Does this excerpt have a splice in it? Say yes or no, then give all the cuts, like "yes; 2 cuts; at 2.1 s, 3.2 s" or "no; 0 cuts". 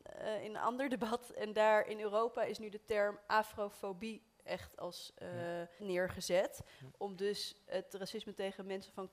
yes; 1 cut; at 5.8 s